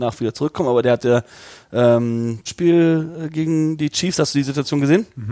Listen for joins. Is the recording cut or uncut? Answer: cut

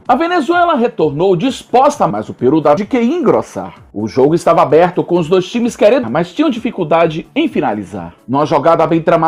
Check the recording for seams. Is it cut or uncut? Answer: cut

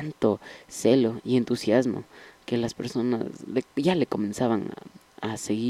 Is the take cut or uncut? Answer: uncut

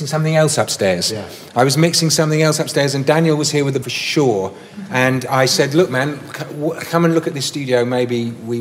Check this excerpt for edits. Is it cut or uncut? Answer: cut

